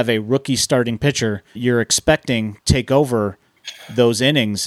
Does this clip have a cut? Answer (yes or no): yes